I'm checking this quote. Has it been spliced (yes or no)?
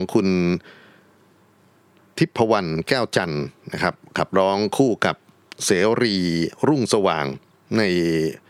no